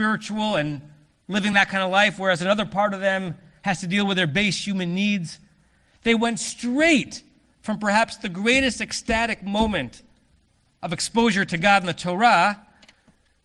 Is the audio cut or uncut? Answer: uncut